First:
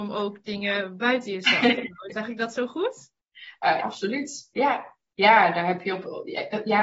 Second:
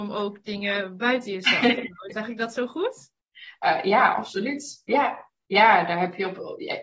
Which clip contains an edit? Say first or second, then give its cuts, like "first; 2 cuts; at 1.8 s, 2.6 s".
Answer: first; 1 cut; at 3.8 s